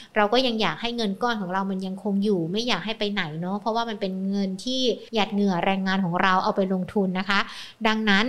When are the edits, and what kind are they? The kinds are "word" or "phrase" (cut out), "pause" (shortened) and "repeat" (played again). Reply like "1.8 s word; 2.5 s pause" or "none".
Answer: 5.1 s pause